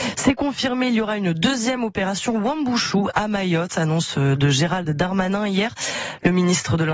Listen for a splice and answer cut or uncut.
uncut